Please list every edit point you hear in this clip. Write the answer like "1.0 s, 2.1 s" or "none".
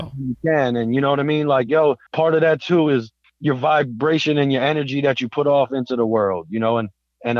none